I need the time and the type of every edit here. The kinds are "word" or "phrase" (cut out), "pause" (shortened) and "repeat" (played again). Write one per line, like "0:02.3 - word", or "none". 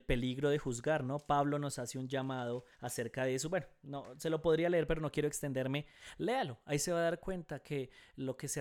0:02.7 - pause

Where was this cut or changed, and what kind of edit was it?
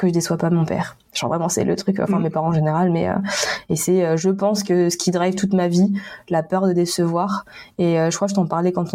none

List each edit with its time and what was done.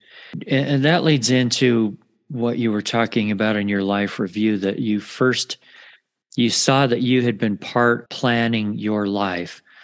0:08.1 - word

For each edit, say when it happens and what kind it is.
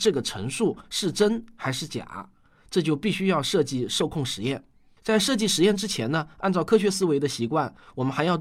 none

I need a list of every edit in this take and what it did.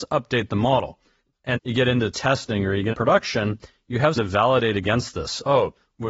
0:01.6 - word
0:02.9 - word
0:04.2 - word

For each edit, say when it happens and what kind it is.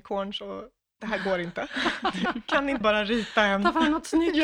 0:02.8 - word

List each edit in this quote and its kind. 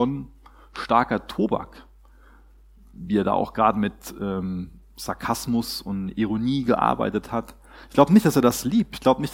none

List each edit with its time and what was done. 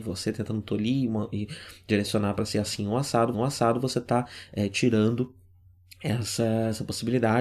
0:03.3 - repeat

